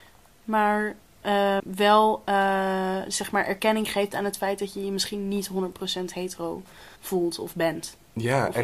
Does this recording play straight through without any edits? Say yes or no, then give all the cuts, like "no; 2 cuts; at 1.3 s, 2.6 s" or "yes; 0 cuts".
no; 2 cuts; at 1.6 s, 7.0 s